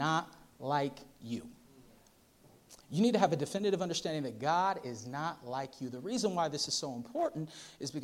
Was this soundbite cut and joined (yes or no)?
no